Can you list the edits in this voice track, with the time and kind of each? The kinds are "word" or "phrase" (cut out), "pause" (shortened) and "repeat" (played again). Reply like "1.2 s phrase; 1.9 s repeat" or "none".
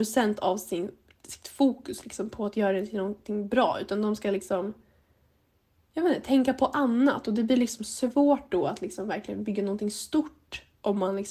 none